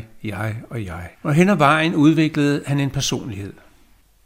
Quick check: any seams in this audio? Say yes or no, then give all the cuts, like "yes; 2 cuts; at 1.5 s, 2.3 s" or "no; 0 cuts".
yes; 1 cut; at 1.1 s